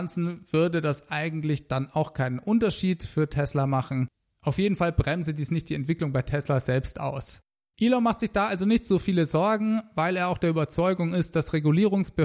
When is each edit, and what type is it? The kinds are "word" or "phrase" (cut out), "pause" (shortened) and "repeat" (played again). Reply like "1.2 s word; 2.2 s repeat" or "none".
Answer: none